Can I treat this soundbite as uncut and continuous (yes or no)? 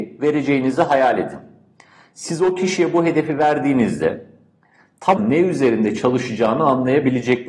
no